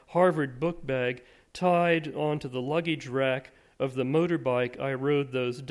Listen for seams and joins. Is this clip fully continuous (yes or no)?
yes